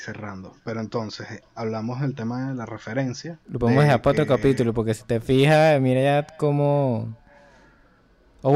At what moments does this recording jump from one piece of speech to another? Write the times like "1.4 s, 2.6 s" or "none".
3.4 s